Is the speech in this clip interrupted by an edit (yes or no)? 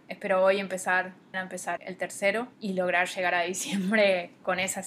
yes